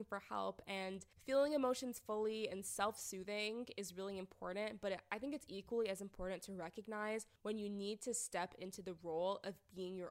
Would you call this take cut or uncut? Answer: cut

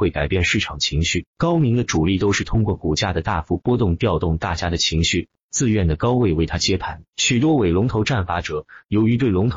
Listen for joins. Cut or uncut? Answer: cut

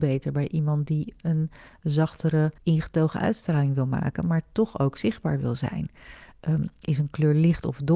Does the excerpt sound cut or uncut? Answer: cut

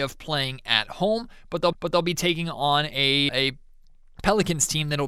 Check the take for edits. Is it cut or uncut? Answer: cut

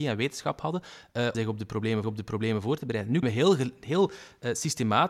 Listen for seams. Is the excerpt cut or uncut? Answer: cut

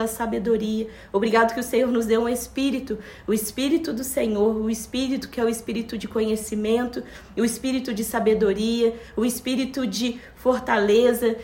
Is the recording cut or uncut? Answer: uncut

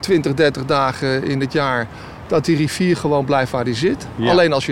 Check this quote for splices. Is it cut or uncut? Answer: uncut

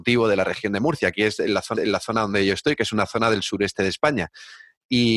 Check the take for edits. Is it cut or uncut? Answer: cut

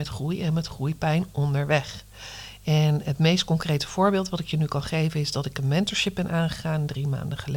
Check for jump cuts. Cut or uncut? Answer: uncut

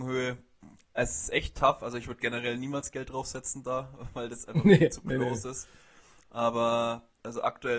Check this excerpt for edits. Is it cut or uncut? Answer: uncut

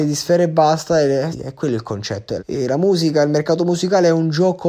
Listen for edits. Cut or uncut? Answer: cut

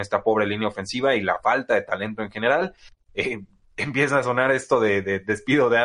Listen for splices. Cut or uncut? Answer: uncut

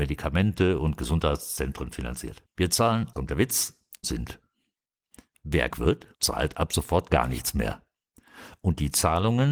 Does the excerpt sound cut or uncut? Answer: cut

